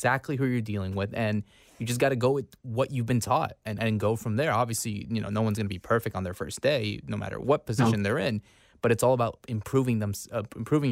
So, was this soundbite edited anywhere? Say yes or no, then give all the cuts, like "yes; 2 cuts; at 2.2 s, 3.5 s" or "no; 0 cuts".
no; 0 cuts